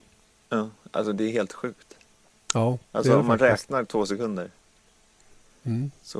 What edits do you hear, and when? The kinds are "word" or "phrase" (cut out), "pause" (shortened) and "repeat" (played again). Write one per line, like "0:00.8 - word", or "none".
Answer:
none